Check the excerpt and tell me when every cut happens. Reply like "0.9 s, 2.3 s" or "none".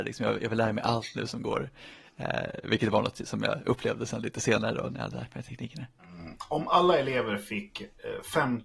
none